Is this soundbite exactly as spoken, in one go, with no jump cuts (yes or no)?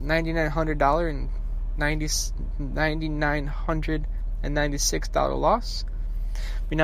yes